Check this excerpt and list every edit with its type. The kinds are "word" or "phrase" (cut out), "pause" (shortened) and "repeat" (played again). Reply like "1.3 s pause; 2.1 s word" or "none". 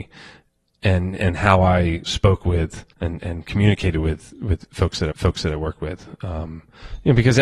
2.1 s phrase; 2.9 s pause; 5.1 s repeat